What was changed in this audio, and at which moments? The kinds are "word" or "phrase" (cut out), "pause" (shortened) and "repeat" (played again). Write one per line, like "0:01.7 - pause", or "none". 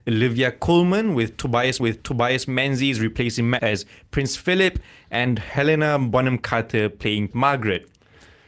0:01.8 - repeat
0:03.6 - word
0:07.3 - word